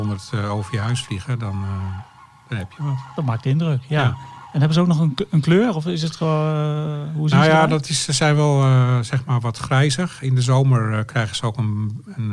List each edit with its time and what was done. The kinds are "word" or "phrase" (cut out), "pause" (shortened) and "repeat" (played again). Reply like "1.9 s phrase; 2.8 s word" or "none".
none